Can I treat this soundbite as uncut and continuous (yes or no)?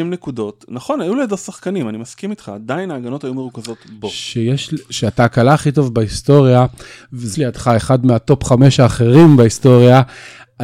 no